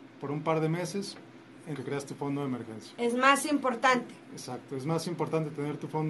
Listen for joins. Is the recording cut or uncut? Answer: cut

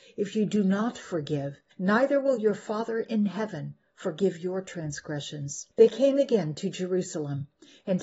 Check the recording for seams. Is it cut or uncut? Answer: cut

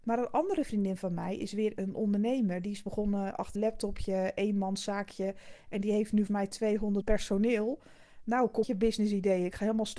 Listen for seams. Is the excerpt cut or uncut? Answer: cut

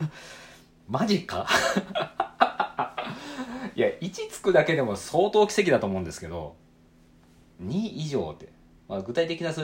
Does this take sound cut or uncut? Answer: uncut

